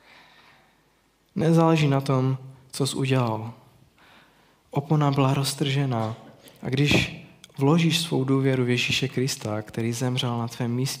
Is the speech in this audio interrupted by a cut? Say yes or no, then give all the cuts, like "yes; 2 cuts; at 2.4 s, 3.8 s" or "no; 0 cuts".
no; 0 cuts